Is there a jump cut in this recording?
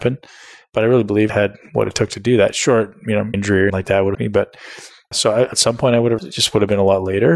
yes; 7 cuts; at 1.3 s, 3.3 s, 3.7 s, 4.1 s, 5.1 s, 5.5 s, 6.2 s

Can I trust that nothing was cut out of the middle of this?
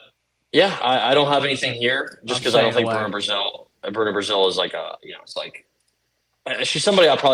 yes; 0 cuts

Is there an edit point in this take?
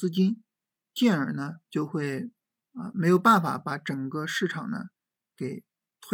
yes; 1 cut; at 1.6 s

